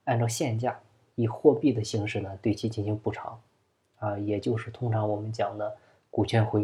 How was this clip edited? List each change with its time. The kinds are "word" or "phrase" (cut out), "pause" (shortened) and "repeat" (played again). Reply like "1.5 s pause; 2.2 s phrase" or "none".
none